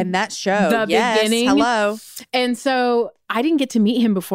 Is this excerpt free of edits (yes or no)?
yes